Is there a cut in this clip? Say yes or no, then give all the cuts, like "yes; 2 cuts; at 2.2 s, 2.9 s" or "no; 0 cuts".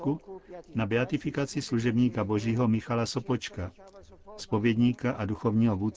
no; 0 cuts